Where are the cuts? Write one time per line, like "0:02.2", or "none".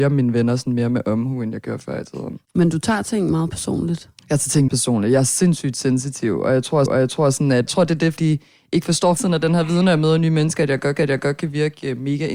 0:02.4
0:04.7
0:06.9
0:07.7
0:08.2
0:09.2
0:11.0